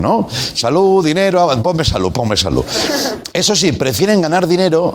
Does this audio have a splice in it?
no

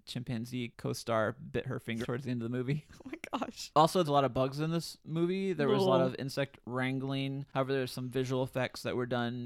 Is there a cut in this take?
yes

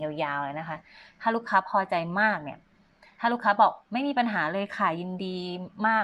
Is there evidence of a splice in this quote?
no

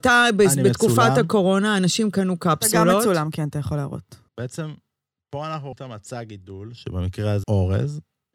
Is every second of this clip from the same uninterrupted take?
no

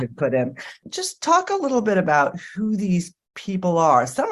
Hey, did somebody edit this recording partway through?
no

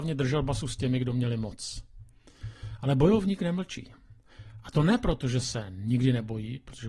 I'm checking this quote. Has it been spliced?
no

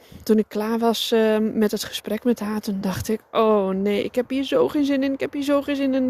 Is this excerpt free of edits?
yes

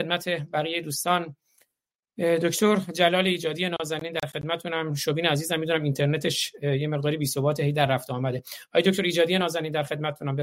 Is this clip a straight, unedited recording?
yes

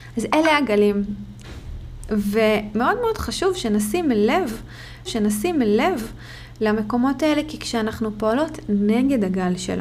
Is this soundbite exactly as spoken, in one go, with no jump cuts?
no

